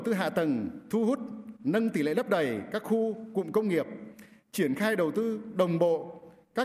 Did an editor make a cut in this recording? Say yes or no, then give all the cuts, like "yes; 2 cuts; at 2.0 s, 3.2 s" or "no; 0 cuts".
no; 0 cuts